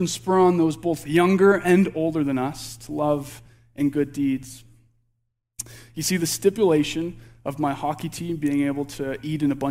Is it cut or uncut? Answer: uncut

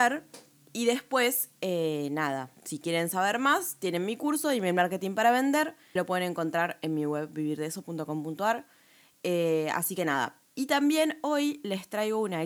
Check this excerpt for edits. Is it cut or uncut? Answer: cut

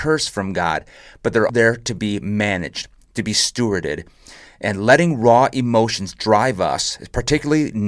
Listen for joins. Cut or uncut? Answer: cut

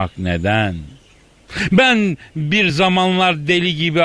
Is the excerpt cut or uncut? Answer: uncut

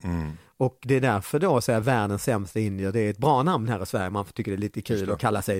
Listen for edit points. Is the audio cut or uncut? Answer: uncut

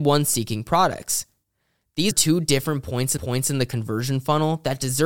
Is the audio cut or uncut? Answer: cut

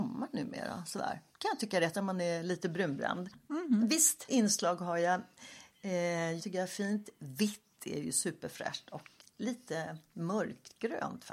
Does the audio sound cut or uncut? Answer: cut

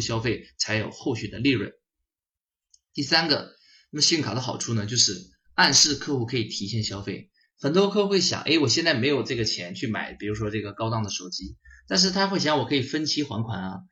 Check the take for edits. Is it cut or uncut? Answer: uncut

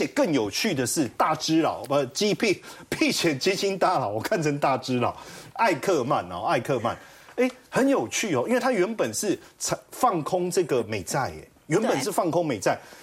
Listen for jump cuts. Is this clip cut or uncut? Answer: uncut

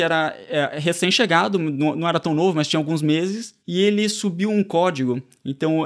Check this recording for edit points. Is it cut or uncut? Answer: cut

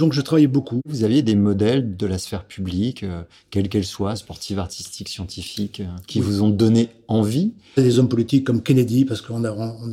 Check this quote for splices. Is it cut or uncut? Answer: uncut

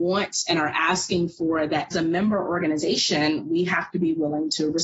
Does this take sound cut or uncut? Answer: cut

